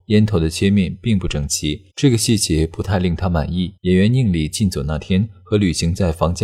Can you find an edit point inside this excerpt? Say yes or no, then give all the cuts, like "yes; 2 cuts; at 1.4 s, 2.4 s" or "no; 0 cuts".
yes; 2 cuts; at 1.9 s, 3.8 s